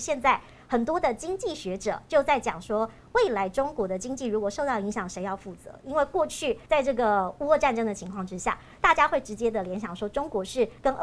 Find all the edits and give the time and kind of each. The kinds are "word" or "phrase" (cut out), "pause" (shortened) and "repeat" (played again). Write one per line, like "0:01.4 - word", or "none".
0:06.7 - pause